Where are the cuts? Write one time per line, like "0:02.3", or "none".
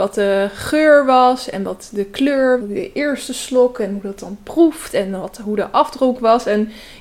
0:02.6